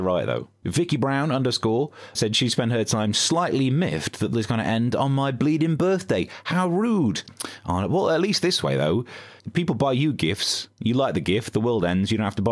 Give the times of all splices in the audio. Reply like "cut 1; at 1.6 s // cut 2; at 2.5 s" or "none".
cut 1; at 2.1 s // cut 2; at 4.3 s // cut 3; at 9.4 s